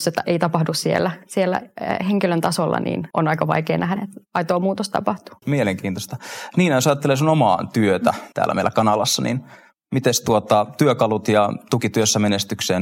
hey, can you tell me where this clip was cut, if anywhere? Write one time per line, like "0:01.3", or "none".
0:03.1
0:04.0
0:08.3